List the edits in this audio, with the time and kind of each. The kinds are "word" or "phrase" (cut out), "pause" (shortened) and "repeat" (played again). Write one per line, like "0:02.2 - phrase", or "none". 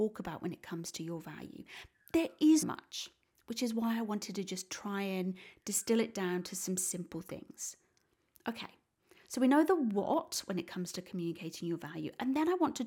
0:02.6 - word

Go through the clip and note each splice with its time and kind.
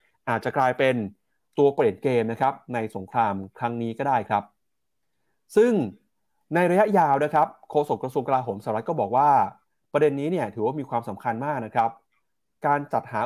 none

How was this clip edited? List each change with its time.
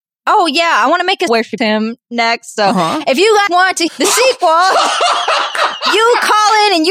0:01.3 - word
0:01.6 - word
0:03.5 - word
0:03.9 - word

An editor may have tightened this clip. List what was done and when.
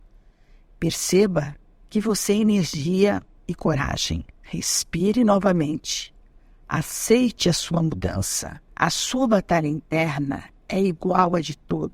0:03.3 - word
0:04.3 - pause
0:08.7 - pause

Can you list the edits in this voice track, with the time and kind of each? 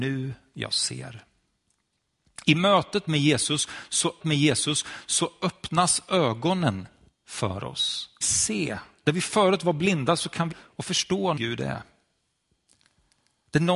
0:04.2 - repeat
0:07.1 - pause
0:08.2 - phrase
0:10.5 - word
0:11.4 - phrase

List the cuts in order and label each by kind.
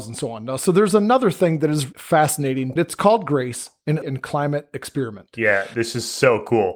0:01.9 - word
0:02.8 - phrase
0:04.0 - phrase

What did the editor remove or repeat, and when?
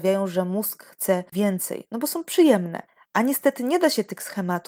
0:01.3 - word
0:02.9 - pause

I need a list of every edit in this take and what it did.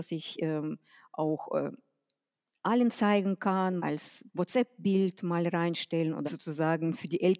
0:03.8 - word
0:04.3 - pause
0:06.3 - word

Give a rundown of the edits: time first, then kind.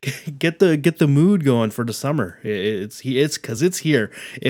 none

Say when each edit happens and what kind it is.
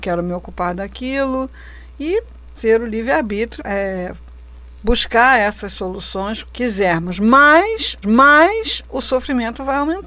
0:02.6 - word
0:03.6 - word
0:06.5 - word
0:08.0 - repeat

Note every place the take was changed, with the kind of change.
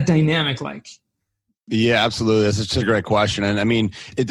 none

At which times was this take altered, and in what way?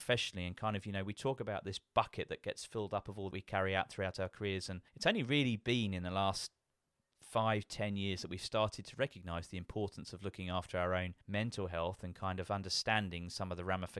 0:03.3 - phrase
0:04.9 - pause
0:11.2 - pause

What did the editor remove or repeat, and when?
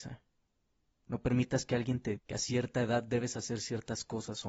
0:02.2 - word

